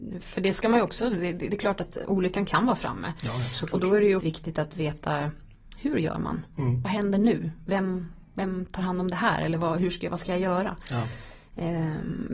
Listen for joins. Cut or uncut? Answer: cut